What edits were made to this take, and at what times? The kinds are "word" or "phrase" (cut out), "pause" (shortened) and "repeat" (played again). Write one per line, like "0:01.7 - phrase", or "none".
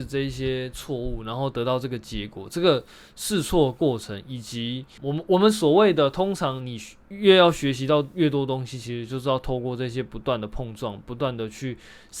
0:05.0 - word